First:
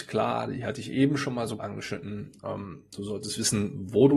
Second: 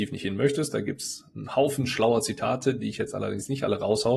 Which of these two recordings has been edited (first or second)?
first